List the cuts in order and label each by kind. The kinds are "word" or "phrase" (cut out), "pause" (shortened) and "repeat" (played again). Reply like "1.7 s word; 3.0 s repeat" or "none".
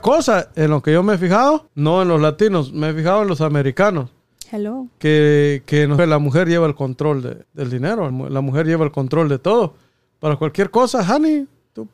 1.7 s pause; 6.0 s phrase; 7.4 s pause; 8.1 s word